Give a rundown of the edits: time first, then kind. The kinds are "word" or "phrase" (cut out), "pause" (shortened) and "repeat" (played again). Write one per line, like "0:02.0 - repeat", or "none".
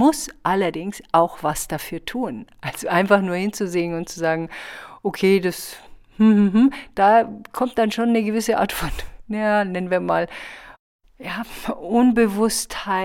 none